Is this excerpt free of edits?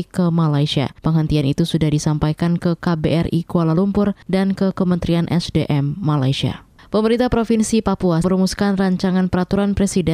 no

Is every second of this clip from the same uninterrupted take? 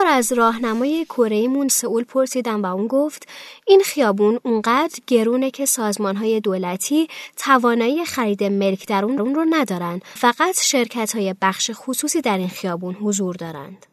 no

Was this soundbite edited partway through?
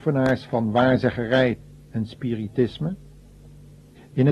no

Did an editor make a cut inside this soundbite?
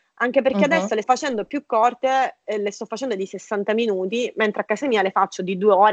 yes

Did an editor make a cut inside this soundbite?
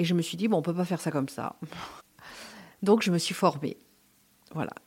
yes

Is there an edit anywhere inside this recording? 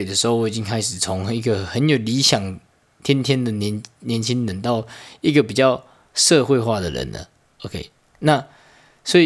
no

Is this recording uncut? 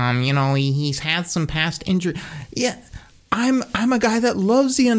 yes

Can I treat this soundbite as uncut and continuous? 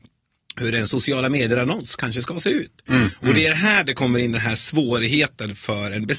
yes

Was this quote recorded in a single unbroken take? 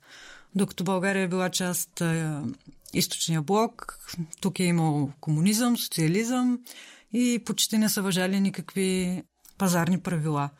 no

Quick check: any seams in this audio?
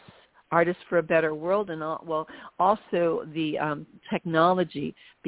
no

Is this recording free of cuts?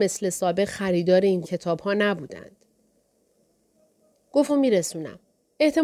no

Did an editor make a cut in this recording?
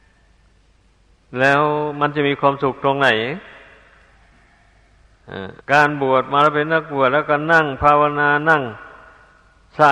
yes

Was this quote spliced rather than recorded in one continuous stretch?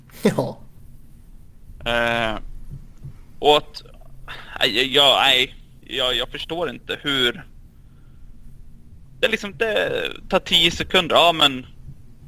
no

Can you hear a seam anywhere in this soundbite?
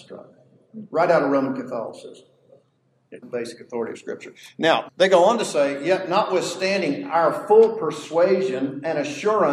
yes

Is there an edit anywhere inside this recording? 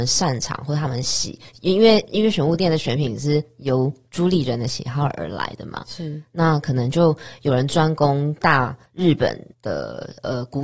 yes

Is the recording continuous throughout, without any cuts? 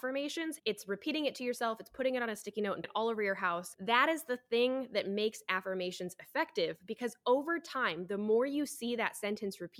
no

